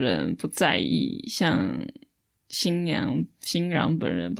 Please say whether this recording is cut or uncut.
uncut